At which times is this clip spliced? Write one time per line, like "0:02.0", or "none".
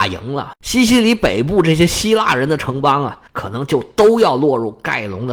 0:03.3